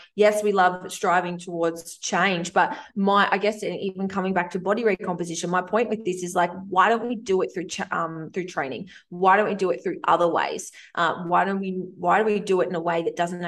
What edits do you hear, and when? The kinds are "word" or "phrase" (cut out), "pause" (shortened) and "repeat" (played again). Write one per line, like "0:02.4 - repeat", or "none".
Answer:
none

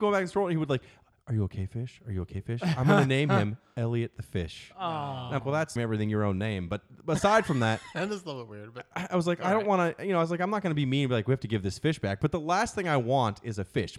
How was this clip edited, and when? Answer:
0:05.4 - word
0:05.8 - phrase

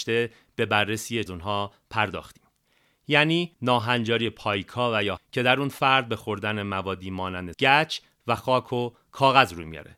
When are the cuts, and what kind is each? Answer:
0:01.3 - phrase
0:03.5 - pause
0:05.2 - word
0:07.5 - word

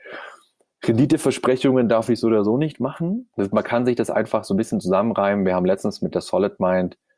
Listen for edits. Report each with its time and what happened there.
none

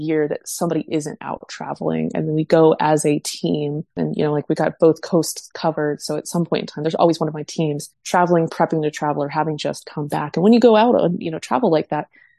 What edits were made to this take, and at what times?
0:03.9 - pause
0:07.9 - pause

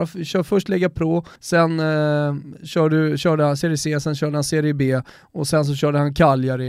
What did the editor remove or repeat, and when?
0:01.4 - pause

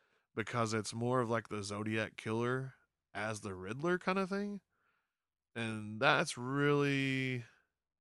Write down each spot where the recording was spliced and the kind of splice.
none

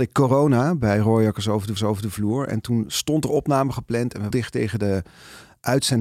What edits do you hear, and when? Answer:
0:01.8 - repeat
0:04.3 - phrase

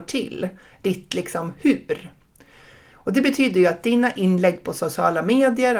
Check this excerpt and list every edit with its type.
none

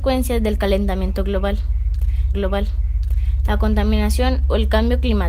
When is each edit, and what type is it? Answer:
0:02.3 - repeat

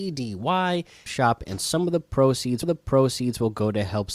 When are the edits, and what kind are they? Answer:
0:01.1 - phrase
0:02.6 - repeat

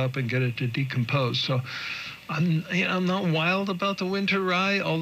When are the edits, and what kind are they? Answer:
none

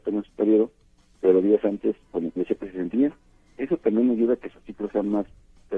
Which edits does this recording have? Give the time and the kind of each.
0:02.4 - phrase
0:02.9 - word

